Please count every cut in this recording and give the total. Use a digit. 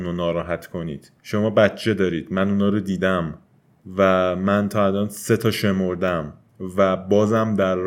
0